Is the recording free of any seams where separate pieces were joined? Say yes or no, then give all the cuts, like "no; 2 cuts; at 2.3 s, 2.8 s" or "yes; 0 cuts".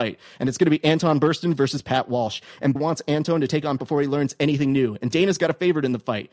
no; 2 cuts; at 2.8 s, 3.8 s